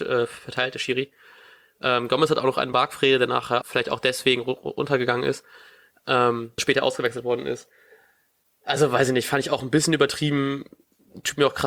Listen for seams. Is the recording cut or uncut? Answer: cut